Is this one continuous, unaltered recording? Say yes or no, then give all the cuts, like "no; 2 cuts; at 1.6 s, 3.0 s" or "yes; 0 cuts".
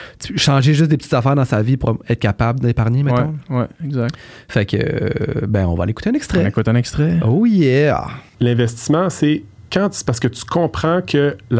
no; 1 cut; at 8.3 s